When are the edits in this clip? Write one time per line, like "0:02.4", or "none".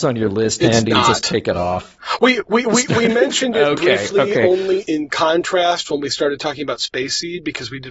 none